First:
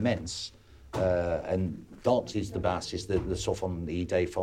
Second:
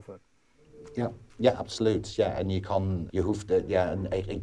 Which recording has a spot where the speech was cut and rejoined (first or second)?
second